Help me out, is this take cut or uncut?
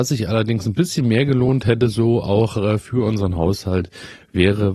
uncut